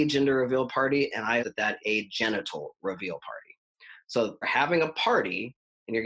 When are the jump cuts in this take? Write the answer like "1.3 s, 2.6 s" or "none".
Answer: 1.4 s, 1.8 s, 4.4 s